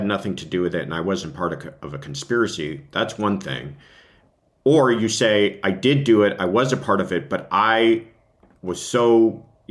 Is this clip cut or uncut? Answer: uncut